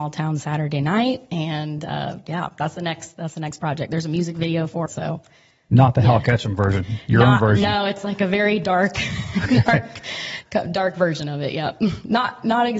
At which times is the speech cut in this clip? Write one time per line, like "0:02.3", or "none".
0:04.9